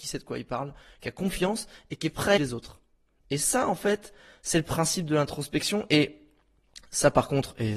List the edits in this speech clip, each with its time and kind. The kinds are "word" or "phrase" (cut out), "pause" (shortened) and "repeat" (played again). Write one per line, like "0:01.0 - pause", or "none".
0:02.4 - word